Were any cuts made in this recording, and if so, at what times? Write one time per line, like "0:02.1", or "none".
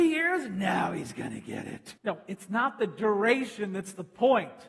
0:02.0